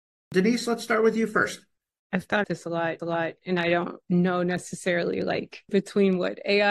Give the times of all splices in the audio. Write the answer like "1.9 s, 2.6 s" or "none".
1.9 s, 2.4 s, 3.0 s, 5.7 s